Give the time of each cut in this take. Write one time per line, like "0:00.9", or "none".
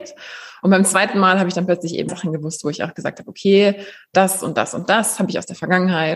0:02.1